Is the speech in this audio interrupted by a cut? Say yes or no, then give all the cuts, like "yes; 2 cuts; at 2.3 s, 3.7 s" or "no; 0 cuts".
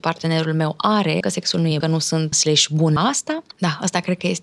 yes; 5 cuts; at 1.2 s, 1.8 s, 2.3 s, 3.0 s, 3.5 s